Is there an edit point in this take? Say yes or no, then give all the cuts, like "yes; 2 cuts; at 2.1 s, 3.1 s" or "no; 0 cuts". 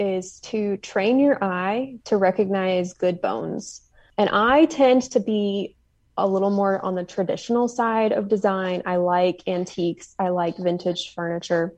no; 0 cuts